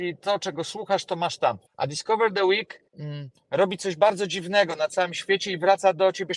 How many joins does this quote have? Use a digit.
2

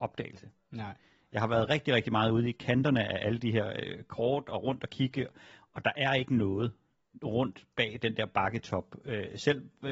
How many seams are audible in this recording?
0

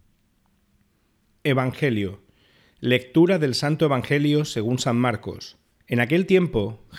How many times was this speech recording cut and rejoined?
1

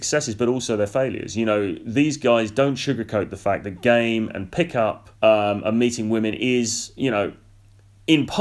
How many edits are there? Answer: 1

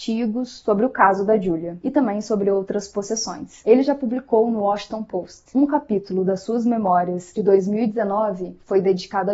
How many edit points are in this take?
0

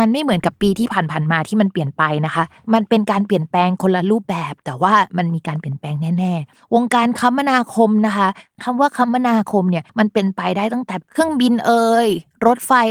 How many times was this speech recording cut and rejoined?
1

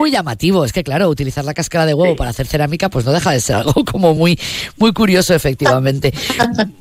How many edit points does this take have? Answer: 0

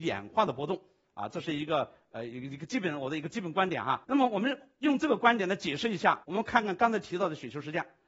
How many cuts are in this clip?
2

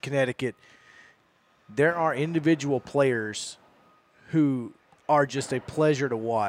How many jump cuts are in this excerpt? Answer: 0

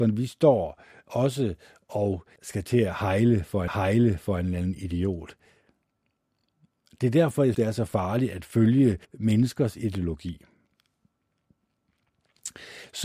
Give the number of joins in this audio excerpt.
4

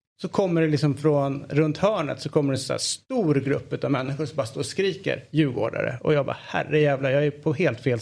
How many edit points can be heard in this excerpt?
0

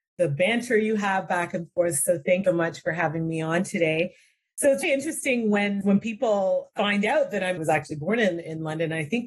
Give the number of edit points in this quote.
4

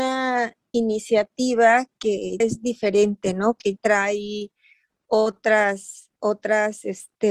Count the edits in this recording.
3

